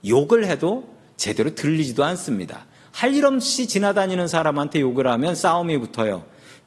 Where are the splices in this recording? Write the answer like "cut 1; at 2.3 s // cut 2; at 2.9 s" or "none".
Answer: none